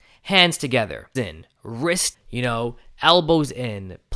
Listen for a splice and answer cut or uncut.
cut